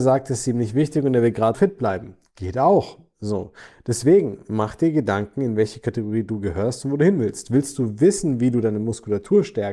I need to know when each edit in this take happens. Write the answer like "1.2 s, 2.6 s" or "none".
1.5 s